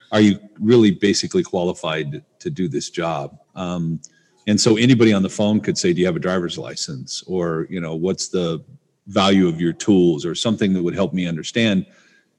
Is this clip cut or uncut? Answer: cut